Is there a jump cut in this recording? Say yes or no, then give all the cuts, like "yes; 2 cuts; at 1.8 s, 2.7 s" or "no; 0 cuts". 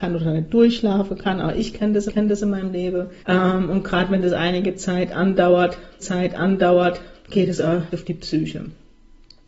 yes; 4 cuts; at 2.1 s, 3.2 s, 6.0 s, 7.9 s